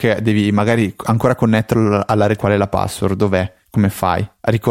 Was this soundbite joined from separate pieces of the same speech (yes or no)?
yes